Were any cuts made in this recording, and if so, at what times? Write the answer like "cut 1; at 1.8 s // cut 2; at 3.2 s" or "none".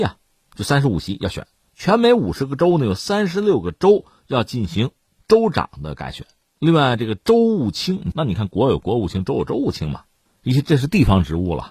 none